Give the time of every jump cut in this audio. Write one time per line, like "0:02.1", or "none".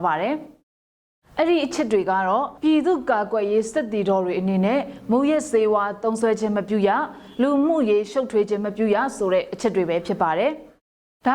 0:02.6